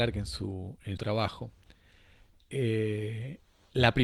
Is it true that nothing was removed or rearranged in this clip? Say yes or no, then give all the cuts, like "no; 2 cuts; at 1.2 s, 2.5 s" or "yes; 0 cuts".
no; 1 cut; at 1.0 s